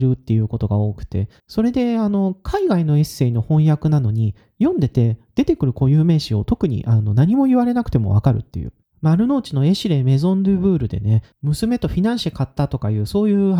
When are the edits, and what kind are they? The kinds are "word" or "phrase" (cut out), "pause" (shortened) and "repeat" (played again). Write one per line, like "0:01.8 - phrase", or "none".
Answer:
0:01.4 - pause
0:08.8 - pause
0:11.3 - pause